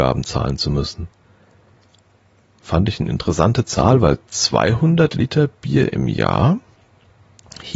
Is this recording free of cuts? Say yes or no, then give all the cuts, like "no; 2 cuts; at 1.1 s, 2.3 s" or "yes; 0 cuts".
yes; 0 cuts